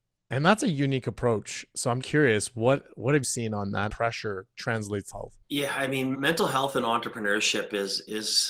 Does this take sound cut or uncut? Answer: cut